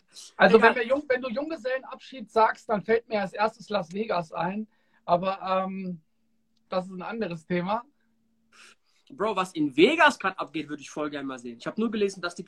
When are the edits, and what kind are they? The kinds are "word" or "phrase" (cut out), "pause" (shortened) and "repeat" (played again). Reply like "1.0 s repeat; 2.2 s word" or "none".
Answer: none